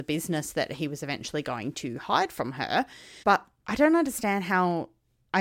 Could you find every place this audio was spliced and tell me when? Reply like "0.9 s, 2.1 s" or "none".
3.2 s